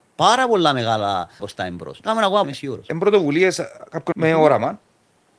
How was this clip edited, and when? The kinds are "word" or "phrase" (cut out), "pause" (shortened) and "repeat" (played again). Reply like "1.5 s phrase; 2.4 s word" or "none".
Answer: 1.4 s word; 2.0 s word; 2.4 s word; 4.1 s word

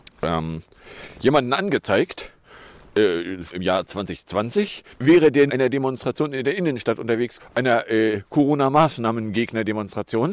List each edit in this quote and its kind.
3.5 s word; 4.9 s pause; 5.5 s phrase; 7.4 s word

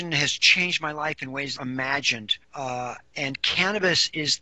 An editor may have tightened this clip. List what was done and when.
1.6 s phrase; 2.4 s pause

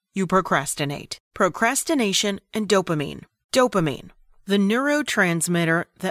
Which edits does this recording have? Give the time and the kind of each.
1.2 s pause; 3.4 s pause

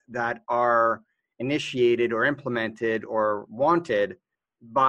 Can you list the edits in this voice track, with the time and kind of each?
none

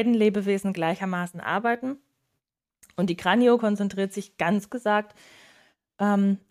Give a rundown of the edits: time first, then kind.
4.7 s word

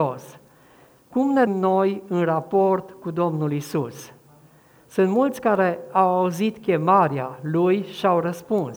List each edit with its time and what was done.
1.5 s word

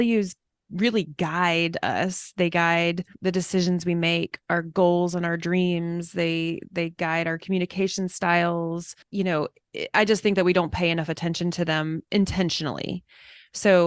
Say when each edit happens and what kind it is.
3.1 s pause; 9.0 s pause

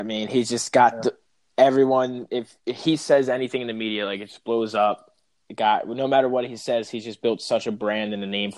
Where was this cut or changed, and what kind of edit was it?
none

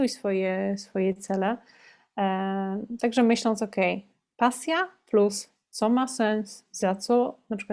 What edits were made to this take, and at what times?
none

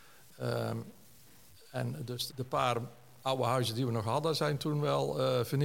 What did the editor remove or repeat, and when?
2.3 s word

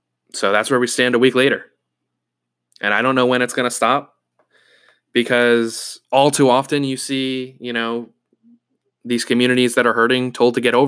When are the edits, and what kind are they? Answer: 6.0 s pause

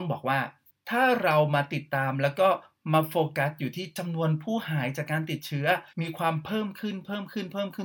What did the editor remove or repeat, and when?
5.9 s pause

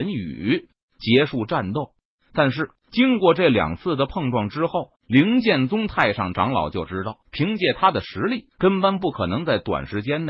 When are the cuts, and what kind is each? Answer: 2.8 s pause; 5.0 s pause; 7.2 s pause; 8.5 s pause

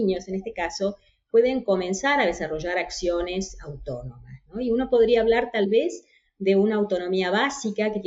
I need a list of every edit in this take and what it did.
none

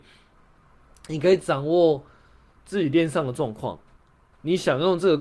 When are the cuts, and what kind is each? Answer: none

